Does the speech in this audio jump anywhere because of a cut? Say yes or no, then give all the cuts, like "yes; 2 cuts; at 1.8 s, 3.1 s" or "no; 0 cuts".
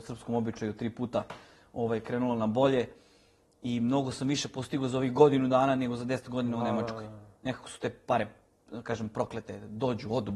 no; 0 cuts